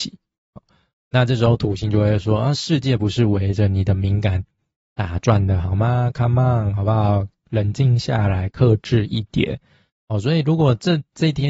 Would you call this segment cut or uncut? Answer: uncut